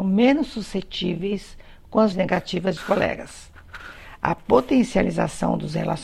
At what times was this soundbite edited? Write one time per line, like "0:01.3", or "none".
0:02.1
0:02.8